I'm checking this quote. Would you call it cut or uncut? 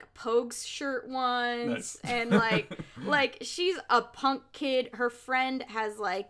uncut